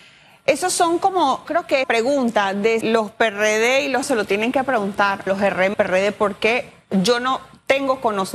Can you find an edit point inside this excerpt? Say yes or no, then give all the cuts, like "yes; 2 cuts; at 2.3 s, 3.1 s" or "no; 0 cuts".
yes; 6 cuts; at 1.5 s, 1.8 s, 2.8 s, 4.0 s, 5.3 s, 5.7 s